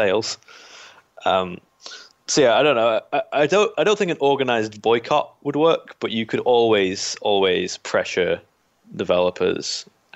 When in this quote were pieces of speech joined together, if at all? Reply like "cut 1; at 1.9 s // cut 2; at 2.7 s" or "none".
none